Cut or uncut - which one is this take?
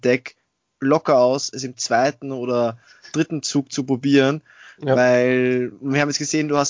uncut